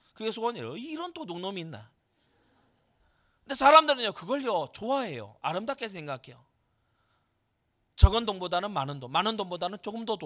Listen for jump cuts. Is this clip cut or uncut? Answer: uncut